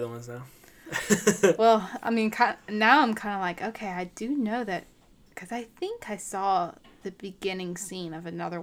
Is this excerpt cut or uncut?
uncut